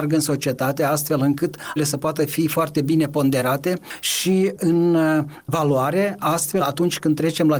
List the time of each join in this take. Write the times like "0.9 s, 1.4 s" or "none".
1.8 s, 4.6 s, 6.6 s